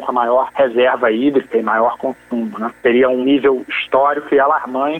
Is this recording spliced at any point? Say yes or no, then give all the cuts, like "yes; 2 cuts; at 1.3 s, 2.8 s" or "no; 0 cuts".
no; 0 cuts